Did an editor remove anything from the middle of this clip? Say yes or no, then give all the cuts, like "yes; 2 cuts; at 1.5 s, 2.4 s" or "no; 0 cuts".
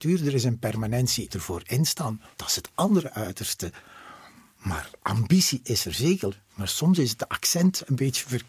yes; 3 cuts; at 1.3 s, 2.3 s, 5.0 s